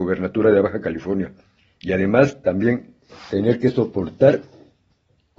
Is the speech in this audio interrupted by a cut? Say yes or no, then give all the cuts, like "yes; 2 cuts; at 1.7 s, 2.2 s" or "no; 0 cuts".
no; 0 cuts